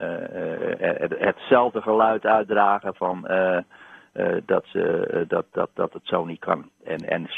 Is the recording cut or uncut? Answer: uncut